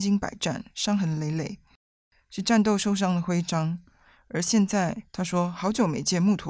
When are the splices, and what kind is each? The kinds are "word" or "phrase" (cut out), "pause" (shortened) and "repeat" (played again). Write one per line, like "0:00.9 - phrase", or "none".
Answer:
none